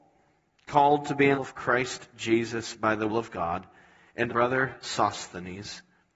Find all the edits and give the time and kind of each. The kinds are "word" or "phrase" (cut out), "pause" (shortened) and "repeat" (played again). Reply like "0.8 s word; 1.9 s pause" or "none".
1.3 s word; 3.1 s word; 4.3 s word